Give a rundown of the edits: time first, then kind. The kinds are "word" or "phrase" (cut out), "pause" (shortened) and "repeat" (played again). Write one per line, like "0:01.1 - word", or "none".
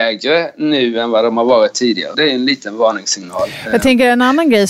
0:02.1 - word